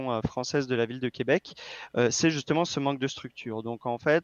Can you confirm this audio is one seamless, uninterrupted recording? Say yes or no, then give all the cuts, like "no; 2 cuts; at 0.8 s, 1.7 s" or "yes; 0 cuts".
yes; 0 cuts